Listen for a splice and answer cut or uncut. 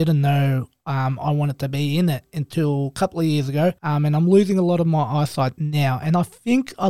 cut